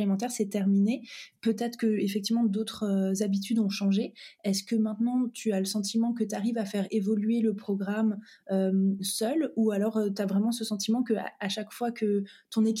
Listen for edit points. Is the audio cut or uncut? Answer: uncut